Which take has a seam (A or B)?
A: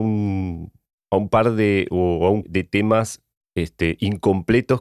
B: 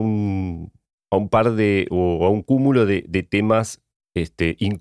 A